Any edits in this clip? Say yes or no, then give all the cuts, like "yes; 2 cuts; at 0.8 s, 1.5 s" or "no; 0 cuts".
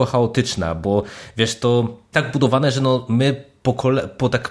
yes; 1 cut; at 2.1 s